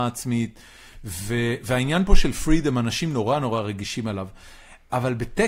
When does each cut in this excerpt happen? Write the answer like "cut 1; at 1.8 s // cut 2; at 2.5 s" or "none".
none